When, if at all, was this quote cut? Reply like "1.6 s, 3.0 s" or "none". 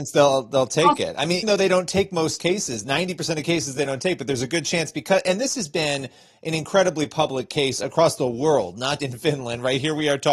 1.4 s, 9.0 s